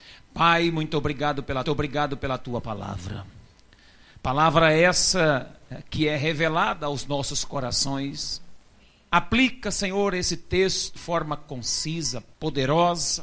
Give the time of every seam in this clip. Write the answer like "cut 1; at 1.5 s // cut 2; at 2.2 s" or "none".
cut 1; at 1.6 s // cut 2; at 8.7 s // cut 3; at 11.0 s // cut 4; at 12.3 s